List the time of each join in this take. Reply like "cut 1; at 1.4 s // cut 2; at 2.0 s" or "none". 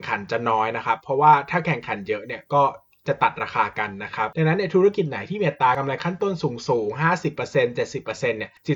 none